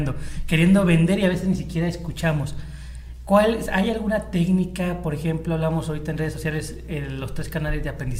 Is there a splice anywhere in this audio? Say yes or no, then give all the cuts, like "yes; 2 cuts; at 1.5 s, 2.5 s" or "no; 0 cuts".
no; 0 cuts